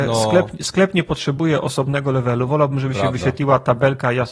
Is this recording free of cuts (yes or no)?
yes